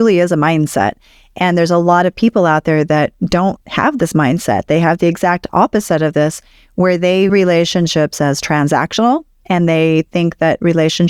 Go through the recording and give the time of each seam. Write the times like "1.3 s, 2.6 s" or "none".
3.6 s, 7.3 s